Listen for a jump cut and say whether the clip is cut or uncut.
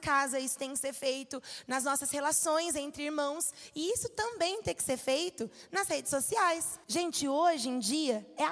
cut